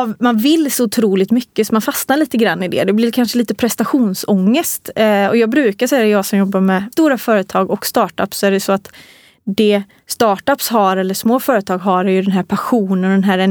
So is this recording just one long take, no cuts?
no; 1 cut; at 6.9 s

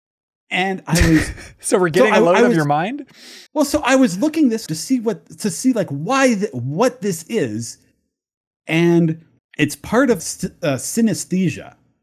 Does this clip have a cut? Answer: yes; 4 cuts; at 3.5 s, 4.7 s, 9.4 s, 10.2 s

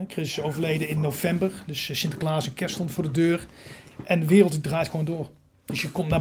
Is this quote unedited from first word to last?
yes; 0 cuts

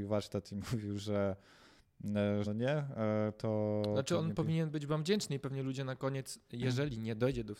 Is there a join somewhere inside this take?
yes; 1 cut; at 2.4 s

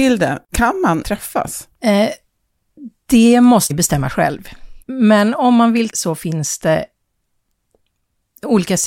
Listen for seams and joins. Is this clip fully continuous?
no; 5 cuts; at 1.0 s, 1.7 s, 3.7 s, 4.8 s, 5.9 s

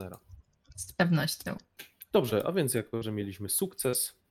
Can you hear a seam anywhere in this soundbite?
no; 0 cuts

